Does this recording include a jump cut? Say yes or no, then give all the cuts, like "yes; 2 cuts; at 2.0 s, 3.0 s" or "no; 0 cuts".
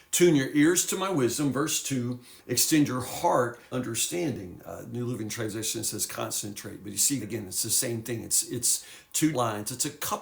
yes; 4 cuts; at 2.4 s, 3.7 s, 7.2 s, 9.3 s